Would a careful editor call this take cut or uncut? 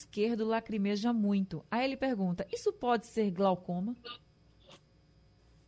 uncut